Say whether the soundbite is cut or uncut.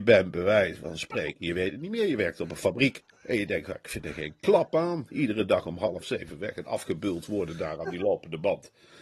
cut